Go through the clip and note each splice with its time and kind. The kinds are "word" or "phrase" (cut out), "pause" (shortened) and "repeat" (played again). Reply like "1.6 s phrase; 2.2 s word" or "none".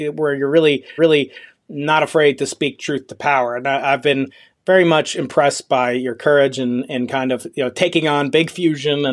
1.0 s repeat